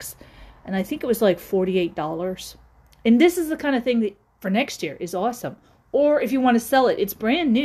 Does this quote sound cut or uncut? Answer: uncut